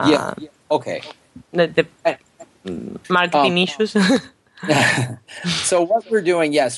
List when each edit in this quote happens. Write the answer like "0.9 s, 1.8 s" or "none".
3.0 s